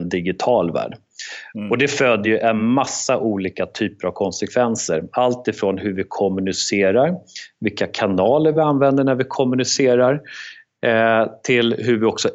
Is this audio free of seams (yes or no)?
yes